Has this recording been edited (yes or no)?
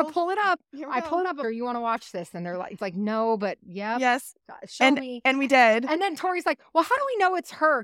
yes